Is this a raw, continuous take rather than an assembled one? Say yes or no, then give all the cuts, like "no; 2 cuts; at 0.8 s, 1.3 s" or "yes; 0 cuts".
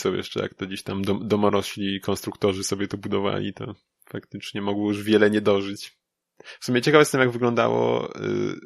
yes; 0 cuts